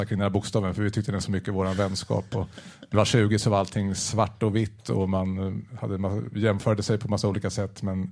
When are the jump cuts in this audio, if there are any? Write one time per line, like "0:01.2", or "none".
0:01.2
0:02.9